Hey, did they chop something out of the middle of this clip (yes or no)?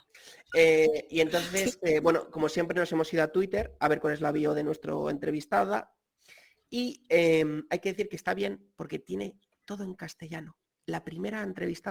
no